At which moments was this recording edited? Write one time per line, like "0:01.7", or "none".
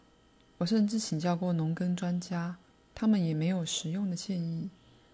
0:02.7